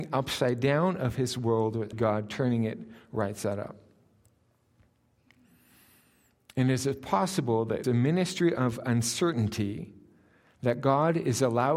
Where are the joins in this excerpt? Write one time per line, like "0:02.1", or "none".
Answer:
0:01.9
0:07.8